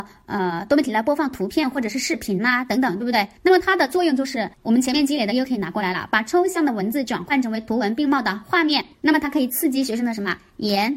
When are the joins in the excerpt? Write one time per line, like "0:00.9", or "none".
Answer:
0:03.4
0:04.5
0:08.9